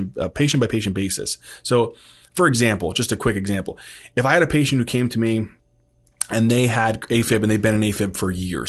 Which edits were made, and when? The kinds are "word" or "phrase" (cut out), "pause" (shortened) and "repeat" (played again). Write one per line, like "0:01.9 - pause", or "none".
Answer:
none